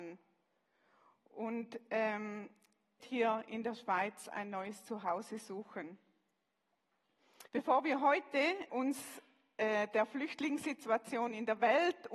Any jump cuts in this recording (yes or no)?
yes